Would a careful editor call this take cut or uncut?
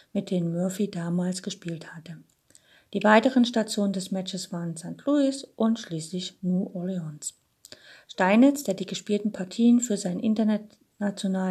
uncut